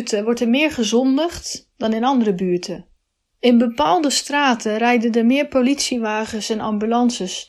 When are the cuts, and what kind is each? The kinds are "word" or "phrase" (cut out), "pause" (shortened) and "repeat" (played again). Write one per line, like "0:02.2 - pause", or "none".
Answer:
none